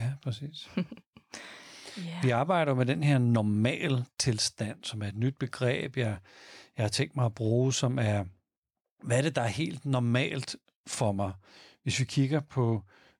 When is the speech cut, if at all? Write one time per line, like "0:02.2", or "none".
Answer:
none